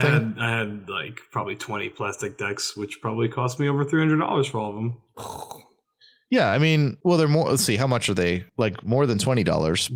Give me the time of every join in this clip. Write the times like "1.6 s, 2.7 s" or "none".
none